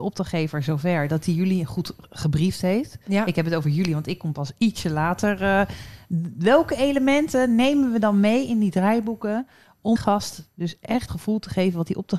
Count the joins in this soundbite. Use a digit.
2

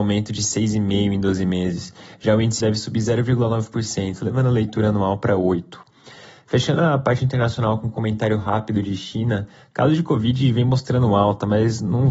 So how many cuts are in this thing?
1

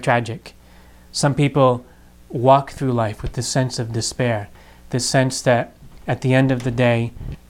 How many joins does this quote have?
0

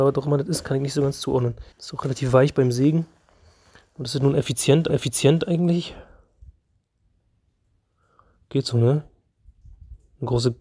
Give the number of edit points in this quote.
2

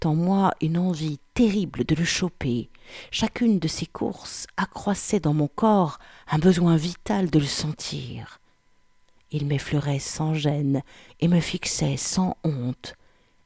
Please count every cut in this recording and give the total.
0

